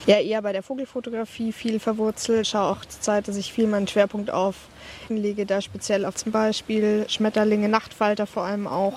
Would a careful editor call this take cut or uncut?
cut